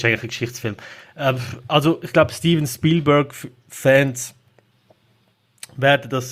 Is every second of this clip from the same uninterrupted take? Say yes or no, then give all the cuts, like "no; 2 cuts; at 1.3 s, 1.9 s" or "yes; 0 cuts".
yes; 0 cuts